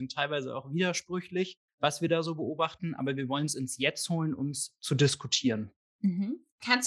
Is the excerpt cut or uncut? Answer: uncut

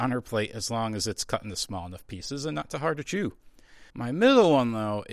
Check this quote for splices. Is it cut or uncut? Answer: cut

